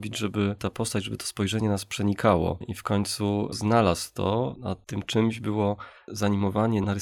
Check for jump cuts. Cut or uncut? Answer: uncut